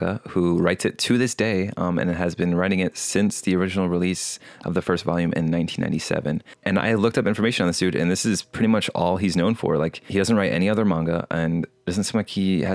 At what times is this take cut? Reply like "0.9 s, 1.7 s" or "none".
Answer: none